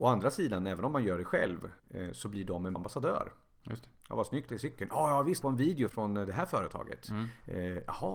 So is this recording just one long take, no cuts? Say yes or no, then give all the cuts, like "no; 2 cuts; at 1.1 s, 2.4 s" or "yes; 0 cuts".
no; 5 cuts; at 1.8 s, 2.8 s, 4.5 s, 5.4 s, 5.9 s